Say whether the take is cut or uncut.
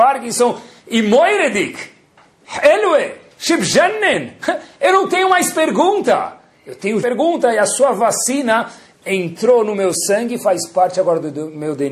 cut